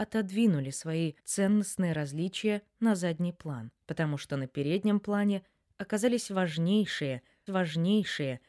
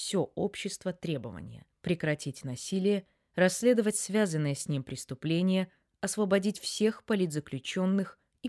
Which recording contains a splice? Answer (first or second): first